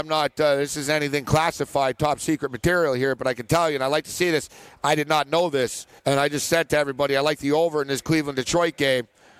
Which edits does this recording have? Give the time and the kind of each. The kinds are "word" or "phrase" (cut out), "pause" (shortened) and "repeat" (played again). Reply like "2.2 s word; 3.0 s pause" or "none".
6.0 s pause